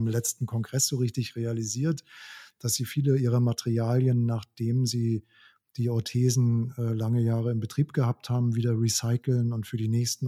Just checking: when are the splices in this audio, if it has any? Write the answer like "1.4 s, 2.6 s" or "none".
none